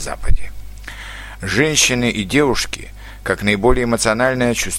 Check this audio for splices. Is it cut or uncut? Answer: uncut